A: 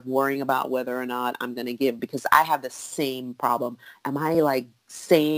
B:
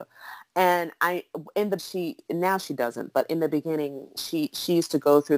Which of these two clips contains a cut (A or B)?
B